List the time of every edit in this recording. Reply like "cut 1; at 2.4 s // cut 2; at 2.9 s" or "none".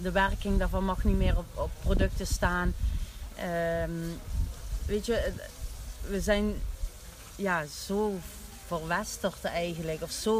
none